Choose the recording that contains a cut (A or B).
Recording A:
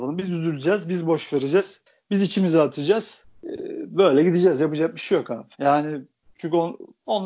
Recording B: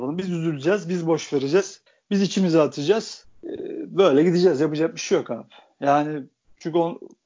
A